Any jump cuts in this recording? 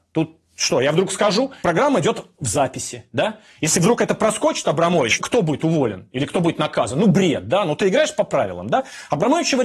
yes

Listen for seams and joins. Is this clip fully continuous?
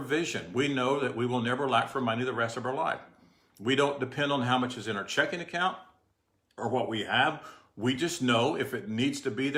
yes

